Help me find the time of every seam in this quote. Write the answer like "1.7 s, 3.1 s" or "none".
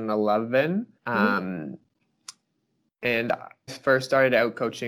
1.0 s, 3.7 s